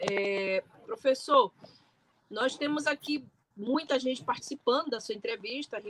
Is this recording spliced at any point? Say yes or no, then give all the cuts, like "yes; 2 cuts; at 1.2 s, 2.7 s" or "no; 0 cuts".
no; 0 cuts